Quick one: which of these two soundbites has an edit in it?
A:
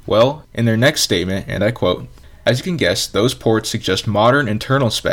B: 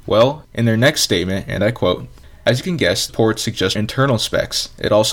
B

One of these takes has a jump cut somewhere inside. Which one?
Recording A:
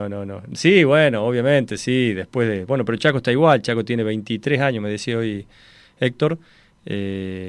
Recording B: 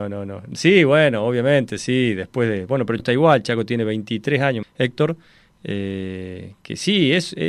B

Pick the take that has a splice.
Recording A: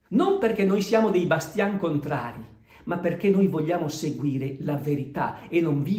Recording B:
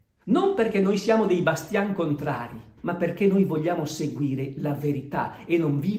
B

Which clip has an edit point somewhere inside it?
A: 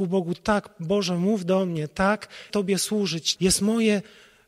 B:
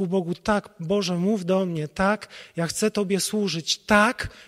A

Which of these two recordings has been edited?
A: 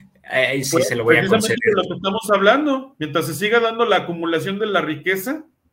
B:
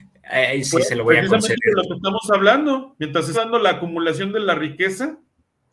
B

